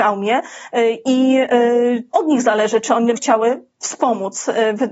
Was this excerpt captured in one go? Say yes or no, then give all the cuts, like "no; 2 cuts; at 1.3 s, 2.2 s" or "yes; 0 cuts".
no; 2 cuts; at 2.1 s, 3.1 s